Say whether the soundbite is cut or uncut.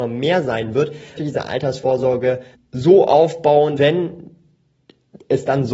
cut